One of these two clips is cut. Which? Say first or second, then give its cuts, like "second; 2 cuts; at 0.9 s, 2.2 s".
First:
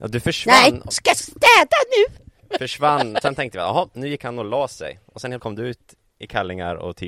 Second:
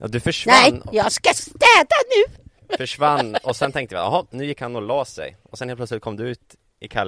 first; 3 cuts; at 0.9 s, 3.2 s, 5.4 s